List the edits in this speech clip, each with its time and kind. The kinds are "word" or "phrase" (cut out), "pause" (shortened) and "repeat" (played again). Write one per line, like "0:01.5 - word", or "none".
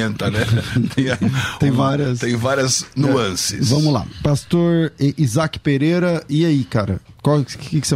0:01.2 - word